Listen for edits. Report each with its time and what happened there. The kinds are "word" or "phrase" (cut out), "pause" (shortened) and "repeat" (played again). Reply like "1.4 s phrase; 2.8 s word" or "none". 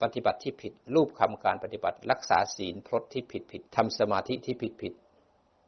3.7 s pause